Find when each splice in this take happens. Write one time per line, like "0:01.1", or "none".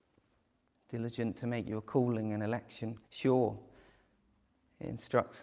0:03.1